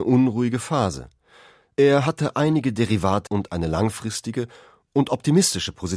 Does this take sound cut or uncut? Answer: cut